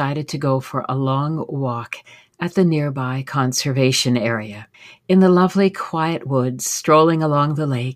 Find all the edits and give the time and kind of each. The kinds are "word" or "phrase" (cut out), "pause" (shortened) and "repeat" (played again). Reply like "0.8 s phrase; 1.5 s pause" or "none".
4.7 s pause